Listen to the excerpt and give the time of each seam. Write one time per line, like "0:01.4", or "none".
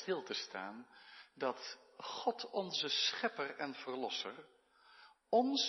none